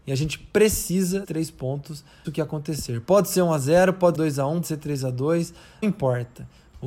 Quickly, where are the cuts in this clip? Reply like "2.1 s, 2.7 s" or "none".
1.2 s, 2.2 s, 4.1 s, 4.6 s, 5.8 s